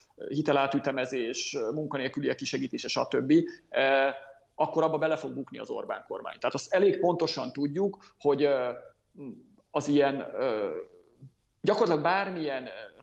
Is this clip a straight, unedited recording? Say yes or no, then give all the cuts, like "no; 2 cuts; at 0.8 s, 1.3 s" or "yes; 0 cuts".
yes; 0 cuts